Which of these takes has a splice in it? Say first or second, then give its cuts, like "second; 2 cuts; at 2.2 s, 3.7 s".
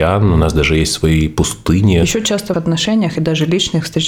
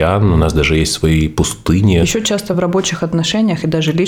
first; 1 cut; at 2.5 s